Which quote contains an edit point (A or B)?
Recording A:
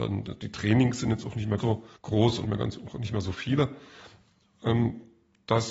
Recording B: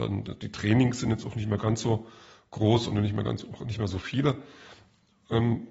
A